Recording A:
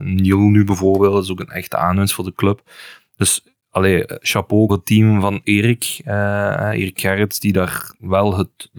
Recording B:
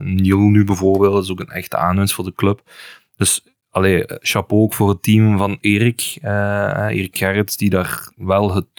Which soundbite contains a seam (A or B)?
A